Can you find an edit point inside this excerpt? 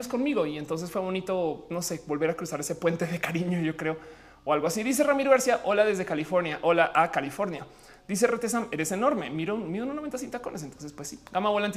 no; 0 cuts

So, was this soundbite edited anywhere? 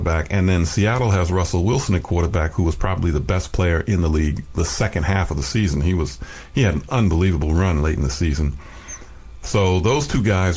no; 0 cuts

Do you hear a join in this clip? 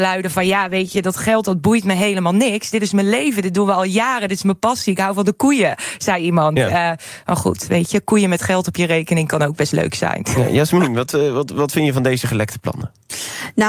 no; 0 cuts

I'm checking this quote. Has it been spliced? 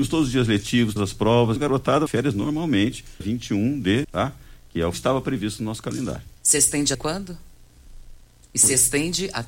yes; 8 cuts; at 1.0 s, 1.6 s, 2.1 s, 3.2 s, 4.0 s, 4.9 s, 6.4 s, 6.9 s

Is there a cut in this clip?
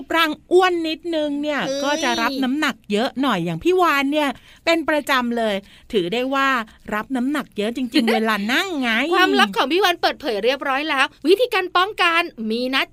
yes; 1 cut; at 11.2 s

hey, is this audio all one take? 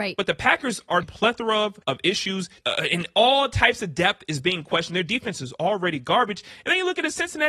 no; 3 cuts; at 1.0 s, 1.8 s, 2.6 s

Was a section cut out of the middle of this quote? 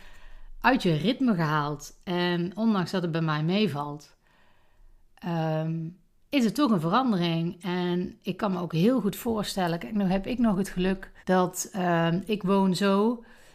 yes; 1 cut; at 11.2 s

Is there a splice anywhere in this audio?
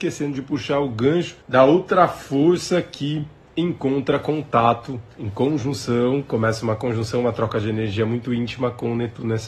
yes; 2 cuts; at 1.4 s, 5.1 s

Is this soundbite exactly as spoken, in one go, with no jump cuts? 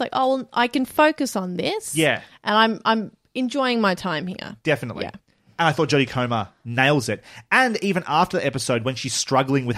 yes; 0 cuts

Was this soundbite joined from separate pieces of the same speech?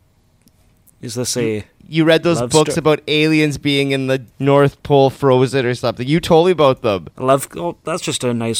yes; 2 cuts; at 4.3 s, 7.1 s

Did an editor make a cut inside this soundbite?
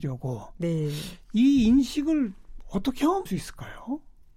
yes; 1 cut; at 3.3 s

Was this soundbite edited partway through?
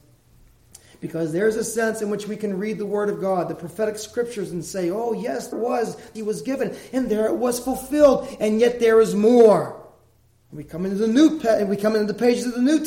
yes; 2 cuts; at 5.5 s, 6.1 s

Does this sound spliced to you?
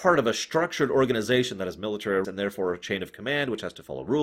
yes; 1 cut; at 2.2 s

